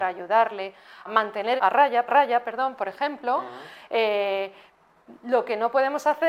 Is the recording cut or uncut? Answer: cut